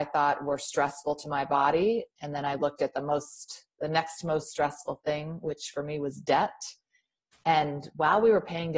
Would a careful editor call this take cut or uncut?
uncut